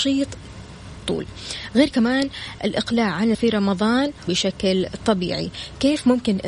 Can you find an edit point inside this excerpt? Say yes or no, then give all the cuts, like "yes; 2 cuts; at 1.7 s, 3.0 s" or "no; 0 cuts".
yes; 5 cuts; at 1.0 s, 1.9 s, 2.6 s, 3.3 s, 4.3 s